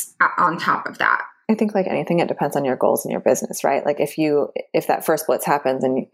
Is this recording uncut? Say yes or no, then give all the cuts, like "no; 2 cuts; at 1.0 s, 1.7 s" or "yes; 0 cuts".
yes; 0 cuts